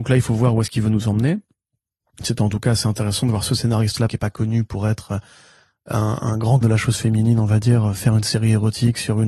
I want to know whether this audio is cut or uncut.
cut